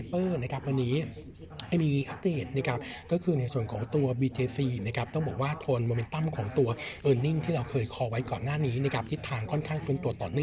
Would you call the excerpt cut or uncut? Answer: uncut